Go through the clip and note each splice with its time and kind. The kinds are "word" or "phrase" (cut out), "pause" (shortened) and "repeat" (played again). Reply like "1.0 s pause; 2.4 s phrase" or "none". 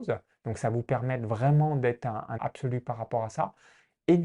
2.4 s word